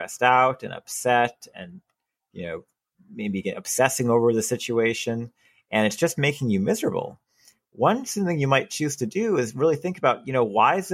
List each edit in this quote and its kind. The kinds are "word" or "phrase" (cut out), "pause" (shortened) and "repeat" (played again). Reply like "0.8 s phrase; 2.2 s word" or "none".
none